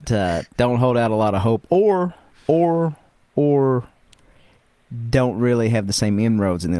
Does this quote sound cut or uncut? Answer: uncut